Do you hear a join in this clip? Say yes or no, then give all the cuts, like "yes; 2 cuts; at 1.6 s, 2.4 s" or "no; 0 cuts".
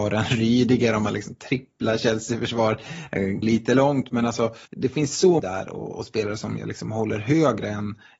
yes; 3 cuts; at 3.4 s, 4.7 s, 5.4 s